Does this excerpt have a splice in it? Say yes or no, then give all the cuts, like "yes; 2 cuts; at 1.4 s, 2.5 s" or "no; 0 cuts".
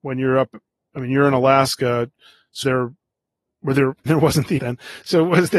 yes; 3 cuts; at 2.6 s, 4.1 s, 4.6 s